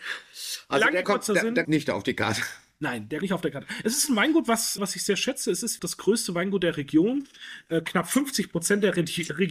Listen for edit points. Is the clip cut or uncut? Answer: cut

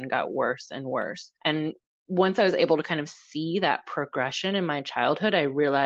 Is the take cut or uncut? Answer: cut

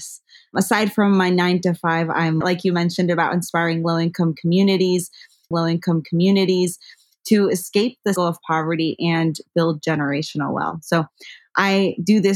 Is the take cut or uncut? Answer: cut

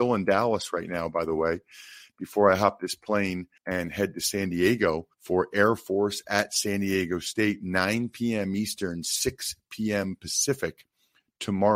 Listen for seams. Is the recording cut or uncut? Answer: cut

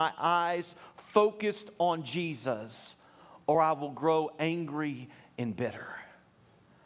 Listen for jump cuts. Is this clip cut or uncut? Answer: uncut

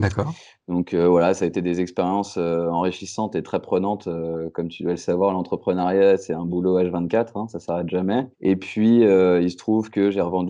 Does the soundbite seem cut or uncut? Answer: cut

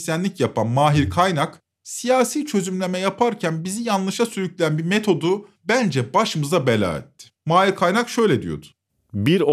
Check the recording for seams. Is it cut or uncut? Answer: cut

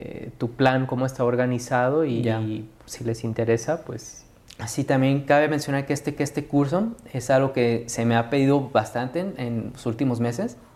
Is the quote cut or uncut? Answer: cut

